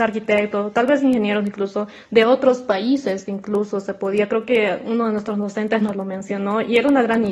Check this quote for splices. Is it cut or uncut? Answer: uncut